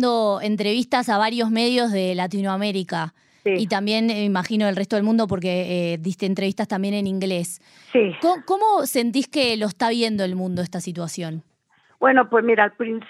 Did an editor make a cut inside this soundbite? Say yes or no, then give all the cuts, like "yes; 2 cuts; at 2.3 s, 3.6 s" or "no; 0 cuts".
no; 0 cuts